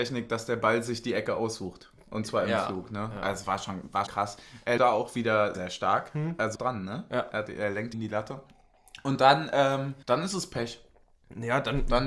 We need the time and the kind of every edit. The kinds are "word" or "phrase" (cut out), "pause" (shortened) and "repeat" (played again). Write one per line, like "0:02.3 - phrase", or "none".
0:04.1 - word
0:04.8 - word
0:05.5 - word
0:06.6 - phrase
0:07.9 - phrase
0:10.0 - pause